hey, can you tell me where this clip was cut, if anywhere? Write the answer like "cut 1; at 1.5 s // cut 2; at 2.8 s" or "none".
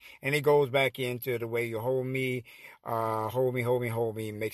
none